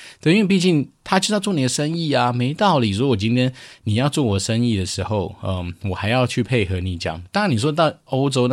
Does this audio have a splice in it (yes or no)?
no